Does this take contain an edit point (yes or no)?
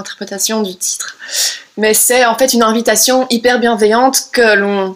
no